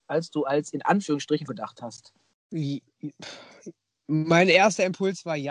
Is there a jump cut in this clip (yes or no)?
yes